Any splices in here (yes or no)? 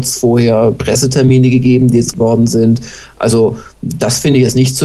yes